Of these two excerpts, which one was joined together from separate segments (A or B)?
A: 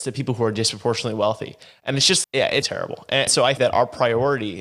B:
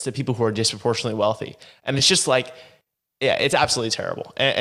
A